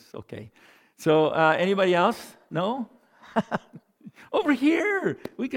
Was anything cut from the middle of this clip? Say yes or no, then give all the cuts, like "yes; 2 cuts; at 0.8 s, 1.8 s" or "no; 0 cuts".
no; 0 cuts